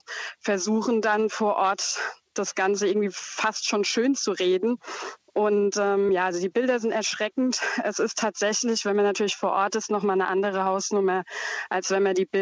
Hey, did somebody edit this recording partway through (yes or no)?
no